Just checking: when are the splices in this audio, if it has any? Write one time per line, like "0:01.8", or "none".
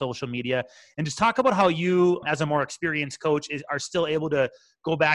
0:02.2